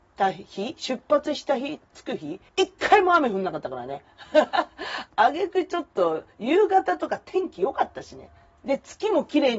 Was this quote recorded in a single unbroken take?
no; 4 cuts; at 1.8 s, 2.5 s, 5.1 s, 8.4 s

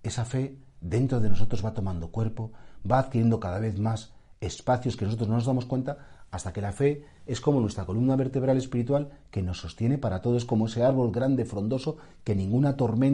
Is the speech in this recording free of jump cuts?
yes; 0 cuts

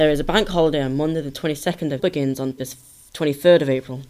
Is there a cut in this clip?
yes; 2 cuts; at 2.0 s, 2.6 s

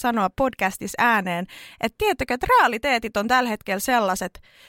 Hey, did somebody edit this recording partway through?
no; 0 cuts

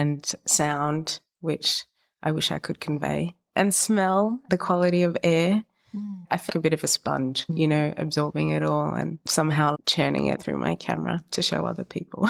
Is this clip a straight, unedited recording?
no; 4 cuts; at 4.5 s, 6.5 s, 9.7 s, 10.4 s

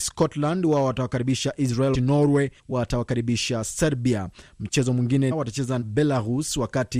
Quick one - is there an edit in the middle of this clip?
yes; 4 cuts; at 1.9 s, 2.6 s, 5.3 s, 5.8 s

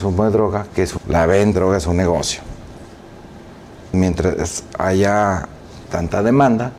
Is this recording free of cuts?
no; 3 cuts; at 1.0 s, 1.5 s, 3.9 s

